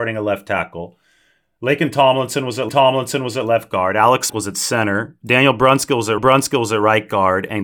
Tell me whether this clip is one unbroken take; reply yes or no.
no